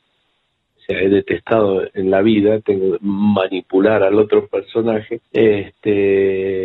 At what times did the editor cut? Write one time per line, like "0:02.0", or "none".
0:05.3